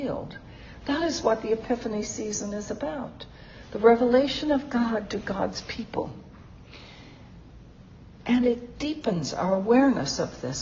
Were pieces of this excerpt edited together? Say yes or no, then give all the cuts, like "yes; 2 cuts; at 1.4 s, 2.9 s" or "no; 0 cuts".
no; 0 cuts